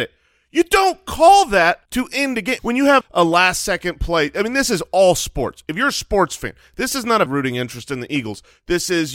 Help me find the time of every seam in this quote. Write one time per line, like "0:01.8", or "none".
0:01.9
0:02.6
0:03.0
0:07.3